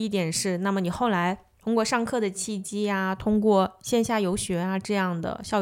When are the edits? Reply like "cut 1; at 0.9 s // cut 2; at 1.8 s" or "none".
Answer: cut 1; at 1.5 s